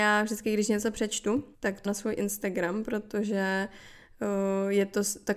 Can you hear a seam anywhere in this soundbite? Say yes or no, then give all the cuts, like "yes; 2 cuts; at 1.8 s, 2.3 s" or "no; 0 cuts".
yes; 2 cuts; at 1.5 s, 1.8 s